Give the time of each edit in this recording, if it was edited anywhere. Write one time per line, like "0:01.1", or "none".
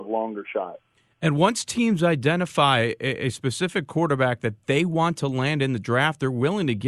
none